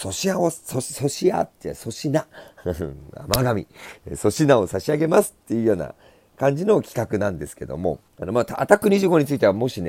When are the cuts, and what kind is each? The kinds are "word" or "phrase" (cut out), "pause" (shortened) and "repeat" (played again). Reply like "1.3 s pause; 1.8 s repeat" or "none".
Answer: 8.1 s pause